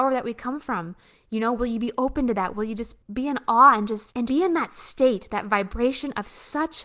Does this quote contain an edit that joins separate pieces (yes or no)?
yes